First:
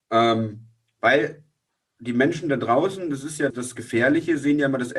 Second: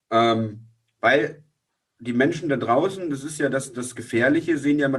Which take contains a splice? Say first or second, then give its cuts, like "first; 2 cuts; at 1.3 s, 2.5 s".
first; 1 cut; at 3.5 s